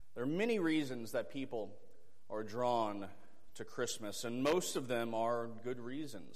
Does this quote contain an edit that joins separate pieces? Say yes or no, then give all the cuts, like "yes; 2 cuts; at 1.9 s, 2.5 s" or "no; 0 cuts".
no; 0 cuts